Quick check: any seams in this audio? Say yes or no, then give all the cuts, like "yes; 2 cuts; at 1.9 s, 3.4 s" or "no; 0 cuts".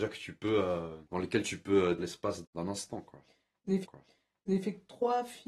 yes; 4 cuts; at 1.1 s, 2.0 s, 2.4 s, 3.8 s